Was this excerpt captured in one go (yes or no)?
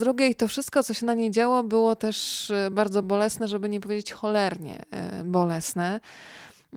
yes